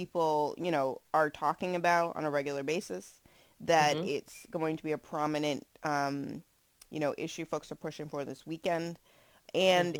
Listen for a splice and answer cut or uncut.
uncut